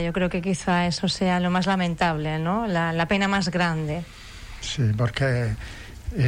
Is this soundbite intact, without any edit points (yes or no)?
yes